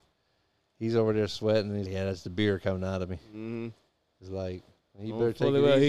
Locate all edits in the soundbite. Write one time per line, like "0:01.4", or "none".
0:01.9